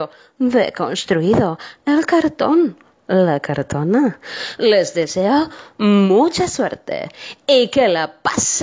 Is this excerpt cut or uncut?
uncut